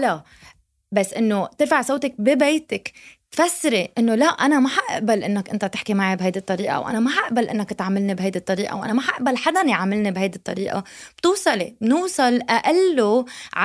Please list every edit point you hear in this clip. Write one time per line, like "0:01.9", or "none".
none